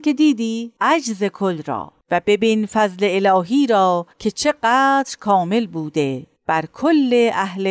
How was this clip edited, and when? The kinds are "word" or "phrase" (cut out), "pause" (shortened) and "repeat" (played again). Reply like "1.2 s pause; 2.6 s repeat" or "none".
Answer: 4.1 s pause